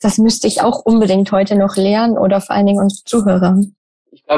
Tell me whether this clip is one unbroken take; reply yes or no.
yes